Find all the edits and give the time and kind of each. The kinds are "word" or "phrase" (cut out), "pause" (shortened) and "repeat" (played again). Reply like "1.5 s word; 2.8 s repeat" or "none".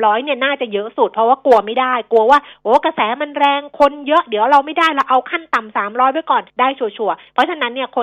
6.5 s pause